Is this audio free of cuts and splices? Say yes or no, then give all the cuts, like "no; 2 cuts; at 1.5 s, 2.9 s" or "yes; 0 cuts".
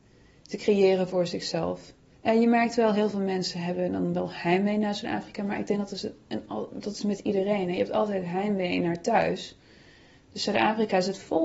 no; 1 cut; at 2.1 s